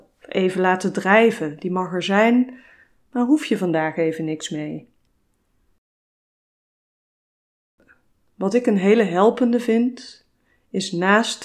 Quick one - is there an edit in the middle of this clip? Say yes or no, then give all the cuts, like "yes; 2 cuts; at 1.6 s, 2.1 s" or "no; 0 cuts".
no; 0 cuts